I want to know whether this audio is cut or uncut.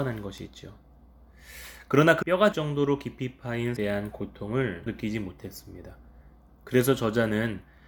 cut